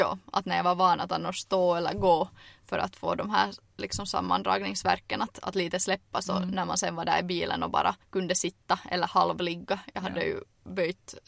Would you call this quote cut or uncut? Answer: cut